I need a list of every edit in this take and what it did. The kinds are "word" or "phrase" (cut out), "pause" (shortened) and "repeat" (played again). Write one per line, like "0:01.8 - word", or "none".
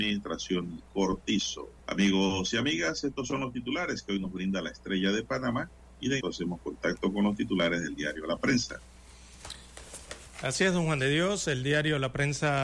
0:01.8 - pause
0:06.2 - word